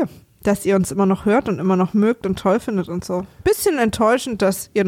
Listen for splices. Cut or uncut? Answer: uncut